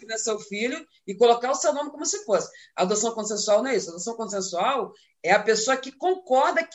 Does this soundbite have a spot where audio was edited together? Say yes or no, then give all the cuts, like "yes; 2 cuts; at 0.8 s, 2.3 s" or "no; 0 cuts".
no; 0 cuts